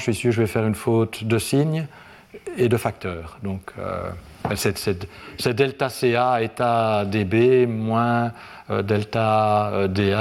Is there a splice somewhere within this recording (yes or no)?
no